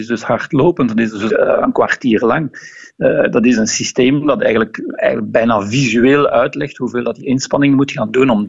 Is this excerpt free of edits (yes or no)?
no